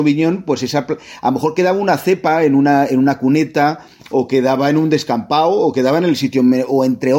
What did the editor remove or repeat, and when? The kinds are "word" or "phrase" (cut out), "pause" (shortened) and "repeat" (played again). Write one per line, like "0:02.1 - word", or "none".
none